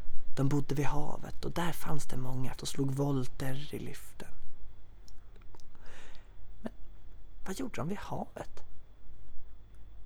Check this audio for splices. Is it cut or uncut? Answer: cut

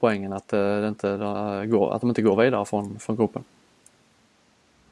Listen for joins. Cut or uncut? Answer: uncut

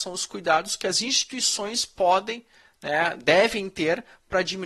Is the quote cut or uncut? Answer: uncut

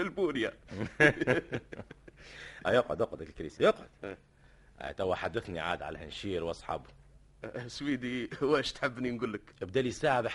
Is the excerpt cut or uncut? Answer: cut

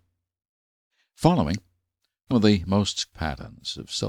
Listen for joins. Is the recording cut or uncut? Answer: cut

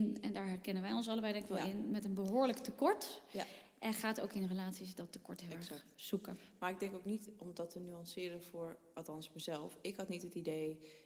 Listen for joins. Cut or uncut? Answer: uncut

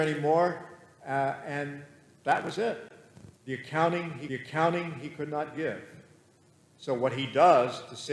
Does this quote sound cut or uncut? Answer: cut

